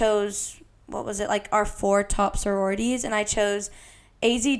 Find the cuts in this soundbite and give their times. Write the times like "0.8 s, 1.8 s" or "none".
none